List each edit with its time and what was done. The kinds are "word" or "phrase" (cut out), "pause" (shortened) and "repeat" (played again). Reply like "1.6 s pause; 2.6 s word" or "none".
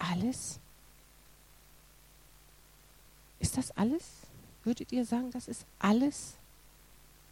none